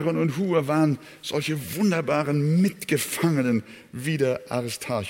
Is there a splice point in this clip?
no; 0 cuts

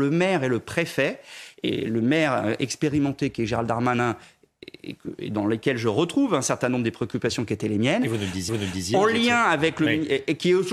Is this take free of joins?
no; 1 cut; at 8.5 s

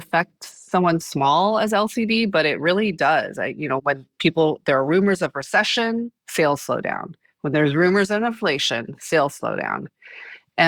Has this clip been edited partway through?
yes; 3 cuts; at 1.0 s, 3.8 s, 6.2 s

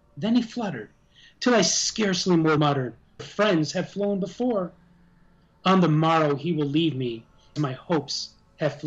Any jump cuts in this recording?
yes; 3 cuts; at 2.6 s, 3.2 s, 7.6 s

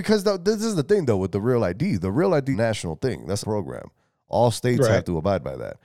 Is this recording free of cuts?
no; 2 cuts; at 2.5 s, 3.4 s

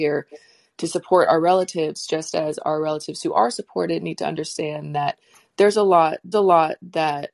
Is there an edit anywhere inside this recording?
yes; 1 cut; at 6.3 s

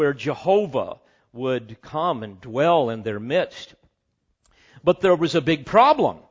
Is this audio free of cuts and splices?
yes; 0 cuts

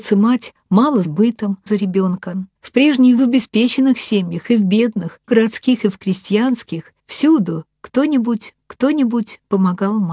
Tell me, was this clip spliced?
yes; 7 cuts; at 1.0 s, 1.7 s, 2.6 s, 3.2 s, 5.3 s, 7.0 s, 8.6 s

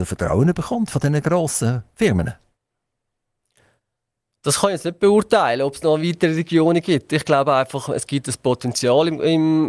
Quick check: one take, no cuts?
yes; 0 cuts

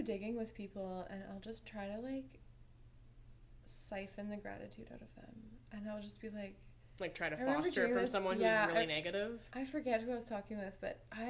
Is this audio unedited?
yes; 0 cuts

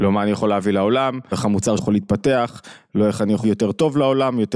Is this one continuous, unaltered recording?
no; 3 cuts; at 1.3 s, 1.8 s, 3.4 s

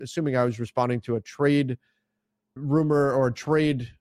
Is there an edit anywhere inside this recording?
yes; 1 cut; at 2.6 s

